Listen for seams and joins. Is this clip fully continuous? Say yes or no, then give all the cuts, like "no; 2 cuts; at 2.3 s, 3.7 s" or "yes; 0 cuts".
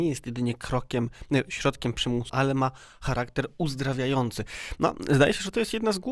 no; 1 cut; at 2.3 s